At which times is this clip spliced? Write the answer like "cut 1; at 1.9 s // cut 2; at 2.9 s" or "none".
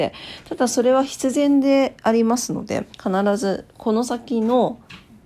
cut 1; at 2.9 s